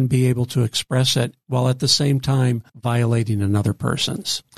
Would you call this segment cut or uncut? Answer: cut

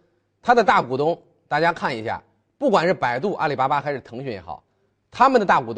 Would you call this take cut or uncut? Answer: uncut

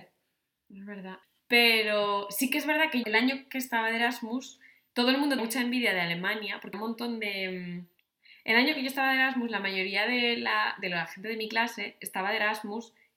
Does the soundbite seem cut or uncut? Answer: cut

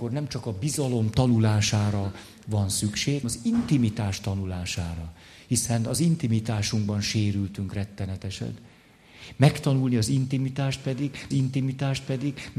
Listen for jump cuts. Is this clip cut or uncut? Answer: cut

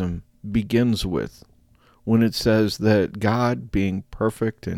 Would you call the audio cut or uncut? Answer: uncut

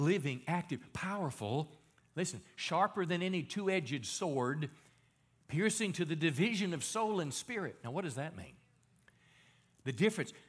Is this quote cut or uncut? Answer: uncut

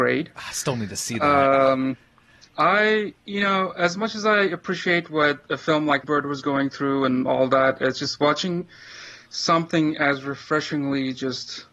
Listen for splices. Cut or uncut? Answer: cut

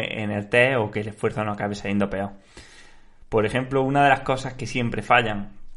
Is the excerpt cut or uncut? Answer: uncut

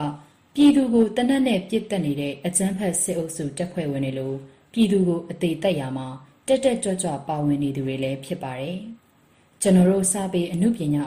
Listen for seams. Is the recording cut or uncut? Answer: cut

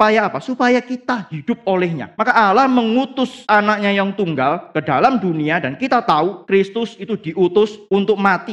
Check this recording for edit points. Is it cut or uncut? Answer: uncut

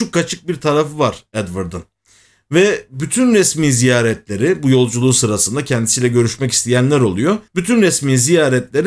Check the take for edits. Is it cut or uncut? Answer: cut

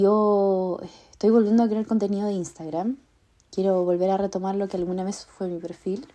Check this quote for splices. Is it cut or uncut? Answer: uncut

